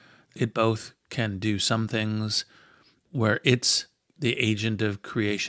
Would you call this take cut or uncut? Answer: uncut